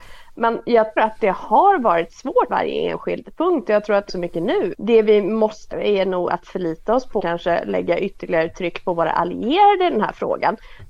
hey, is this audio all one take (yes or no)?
no